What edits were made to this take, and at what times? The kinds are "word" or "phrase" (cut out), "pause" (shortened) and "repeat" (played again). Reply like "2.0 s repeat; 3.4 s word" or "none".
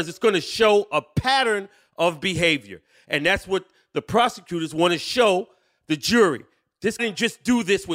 7.0 s word